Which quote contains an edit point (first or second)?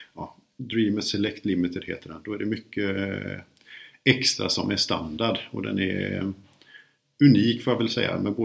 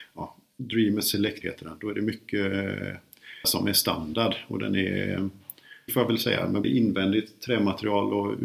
second